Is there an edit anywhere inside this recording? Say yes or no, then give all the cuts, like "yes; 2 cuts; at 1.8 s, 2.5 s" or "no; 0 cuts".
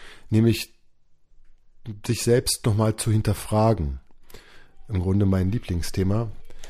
no; 0 cuts